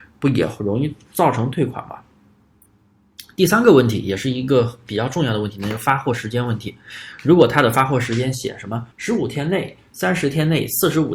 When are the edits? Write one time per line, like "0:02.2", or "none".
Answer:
0:08.9